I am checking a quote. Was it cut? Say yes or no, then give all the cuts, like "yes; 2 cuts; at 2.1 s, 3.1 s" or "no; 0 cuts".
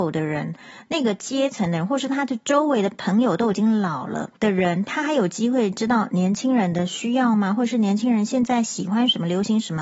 yes; 1 cut; at 4.4 s